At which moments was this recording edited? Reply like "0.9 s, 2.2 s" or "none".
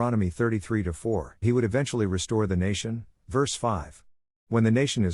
1.4 s